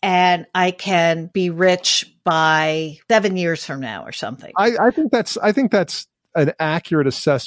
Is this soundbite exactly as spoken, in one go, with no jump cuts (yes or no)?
yes